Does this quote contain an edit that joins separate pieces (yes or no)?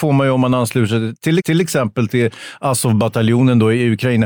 yes